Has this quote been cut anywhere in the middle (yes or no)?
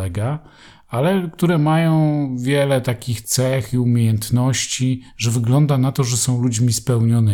no